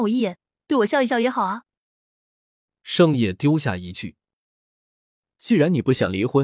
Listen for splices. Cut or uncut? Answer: uncut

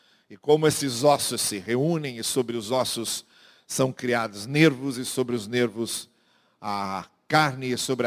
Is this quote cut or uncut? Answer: uncut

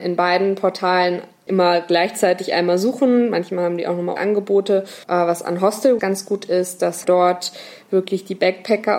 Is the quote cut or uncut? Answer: cut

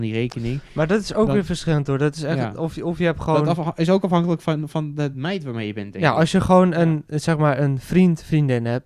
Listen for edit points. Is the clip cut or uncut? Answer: uncut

